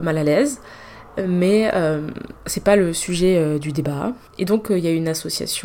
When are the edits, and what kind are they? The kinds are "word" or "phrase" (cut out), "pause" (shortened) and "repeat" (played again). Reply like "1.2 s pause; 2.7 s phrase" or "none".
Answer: 2.4 s pause; 4.3 s pause